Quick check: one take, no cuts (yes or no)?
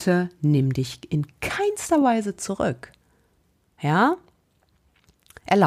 yes